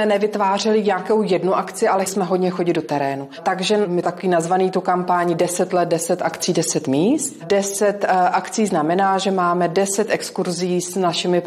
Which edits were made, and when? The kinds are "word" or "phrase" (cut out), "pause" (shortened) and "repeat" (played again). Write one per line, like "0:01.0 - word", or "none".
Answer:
0:02.1 - word
0:04.0 - phrase